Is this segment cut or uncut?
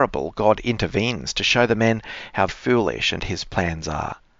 cut